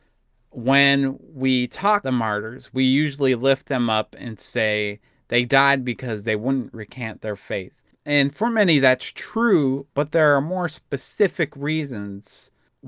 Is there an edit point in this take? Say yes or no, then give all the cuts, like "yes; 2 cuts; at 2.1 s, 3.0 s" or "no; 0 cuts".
yes; 1 cut; at 2.0 s